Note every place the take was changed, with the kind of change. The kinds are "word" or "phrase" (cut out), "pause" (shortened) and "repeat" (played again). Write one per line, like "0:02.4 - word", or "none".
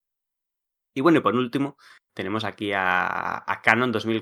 none